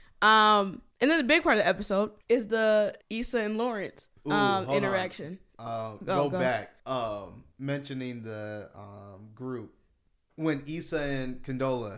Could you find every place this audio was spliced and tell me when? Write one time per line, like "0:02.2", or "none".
0:00.9
0:02.2
0:03.0
0:04.2
0:06.8
0:07.5